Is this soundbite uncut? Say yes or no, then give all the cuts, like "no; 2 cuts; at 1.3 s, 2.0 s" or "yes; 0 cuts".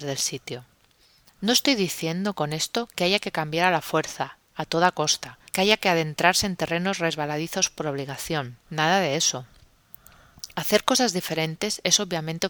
no; 3 cuts; at 4.4 s, 5.5 s, 8.6 s